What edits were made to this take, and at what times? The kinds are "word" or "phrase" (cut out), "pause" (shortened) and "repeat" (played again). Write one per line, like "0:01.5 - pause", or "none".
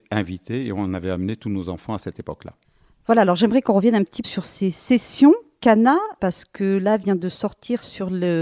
0:04.2 - word
0:06.2 - word